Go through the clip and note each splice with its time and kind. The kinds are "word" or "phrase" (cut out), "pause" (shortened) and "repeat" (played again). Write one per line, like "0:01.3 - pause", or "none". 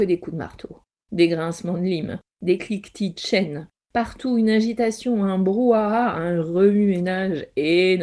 none